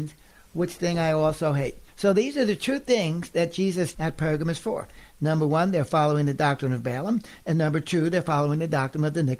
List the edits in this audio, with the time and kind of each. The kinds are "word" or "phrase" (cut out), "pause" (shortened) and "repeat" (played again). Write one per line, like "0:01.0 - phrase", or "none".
0:03.9 - phrase